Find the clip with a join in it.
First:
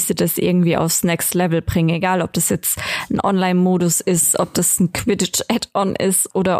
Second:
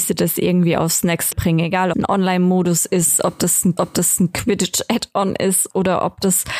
second; 3 cuts; at 1.3 s, 1.9 s, 3.8 s

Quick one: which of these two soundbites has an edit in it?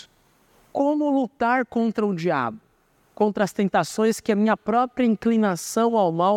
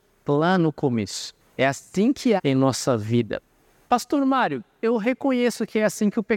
second; 2 cuts; at 1.4 s, 2.4 s

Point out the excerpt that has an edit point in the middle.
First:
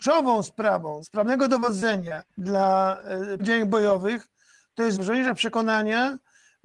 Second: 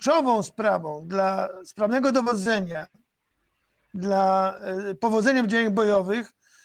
first; 4 cuts; at 1.0 s, 2.3 s, 3.4 s, 4.9 s

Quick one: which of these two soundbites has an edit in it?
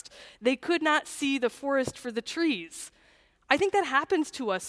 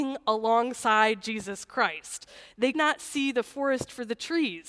second; 1 cut; at 2.7 s

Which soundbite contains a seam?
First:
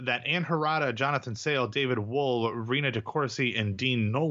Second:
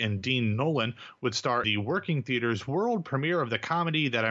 second; 1 cut; at 1.6 s

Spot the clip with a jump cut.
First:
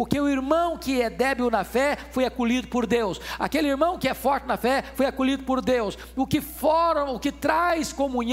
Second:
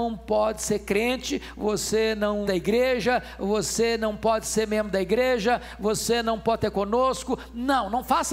second; 2 cuts; at 2.4 s, 6.7 s

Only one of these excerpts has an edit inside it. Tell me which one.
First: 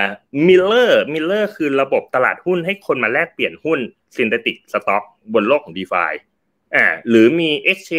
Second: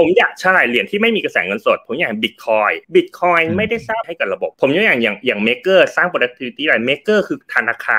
second; 3 cuts; at 2.8 s, 4.0 s, 4.5 s

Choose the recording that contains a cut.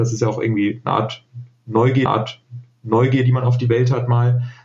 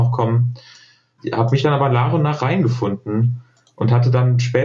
first; 1 cut; at 2.1 s

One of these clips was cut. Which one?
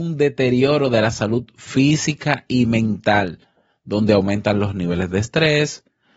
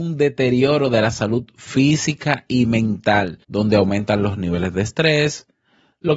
second; 1 cut; at 3.4 s

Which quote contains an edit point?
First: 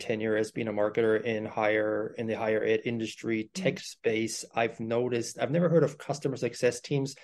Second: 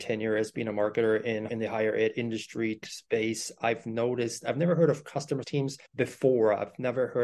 second; 4 cuts; at 1.5 s, 2.8 s, 5.4 s, 5.9 s

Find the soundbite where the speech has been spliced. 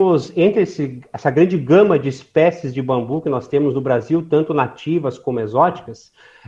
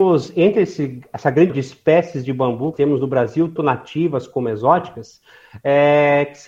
second; 3 cuts; at 1.5 s, 2.7 s, 3.6 s

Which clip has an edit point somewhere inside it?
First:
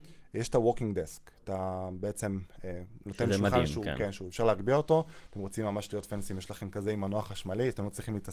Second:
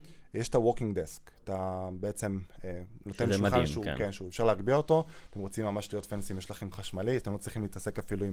second; 1 cut; at 6.7 s

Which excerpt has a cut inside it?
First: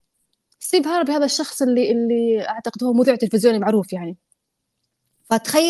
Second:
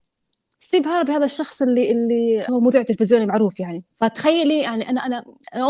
second; 2 cuts; at 2.5 s, 3.9 s

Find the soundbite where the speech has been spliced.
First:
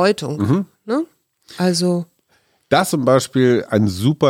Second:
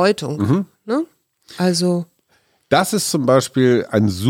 first; 1 cut; at 2.9 s

